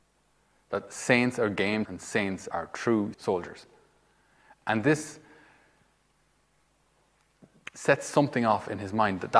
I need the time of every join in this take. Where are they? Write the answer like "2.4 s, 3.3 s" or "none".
1.8 s, 2.5 s, 3.1 s